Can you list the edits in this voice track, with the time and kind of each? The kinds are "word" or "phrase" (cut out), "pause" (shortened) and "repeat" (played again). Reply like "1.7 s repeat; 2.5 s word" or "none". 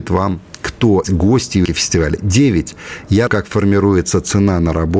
1.0 s word; 1.7 s word; 3.3 s word